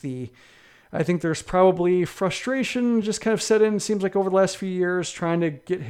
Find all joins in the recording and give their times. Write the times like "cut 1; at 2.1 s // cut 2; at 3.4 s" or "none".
none